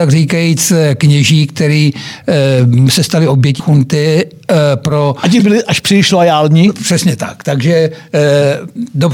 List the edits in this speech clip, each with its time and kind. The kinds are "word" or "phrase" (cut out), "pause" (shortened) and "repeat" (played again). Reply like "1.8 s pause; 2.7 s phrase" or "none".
3.6 s word; 5.4 s word